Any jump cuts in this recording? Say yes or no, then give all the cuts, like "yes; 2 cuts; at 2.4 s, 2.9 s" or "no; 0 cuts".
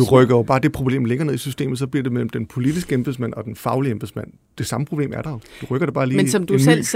no; 0 cuts